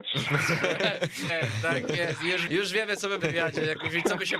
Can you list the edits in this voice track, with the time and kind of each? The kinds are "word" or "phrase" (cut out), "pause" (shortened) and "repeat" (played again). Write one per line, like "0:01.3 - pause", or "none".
0:01.3 - word
0:02.5 - word
0:03.2 - phrase